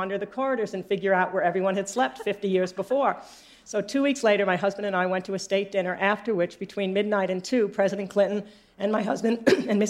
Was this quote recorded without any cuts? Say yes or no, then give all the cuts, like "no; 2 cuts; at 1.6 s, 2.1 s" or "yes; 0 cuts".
yes; 0 cuts